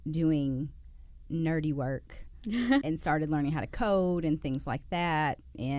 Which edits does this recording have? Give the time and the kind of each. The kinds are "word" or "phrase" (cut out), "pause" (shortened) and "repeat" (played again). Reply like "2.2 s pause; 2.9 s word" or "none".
2.8 s word